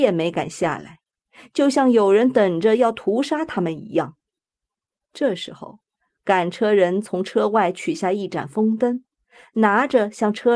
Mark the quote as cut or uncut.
uncut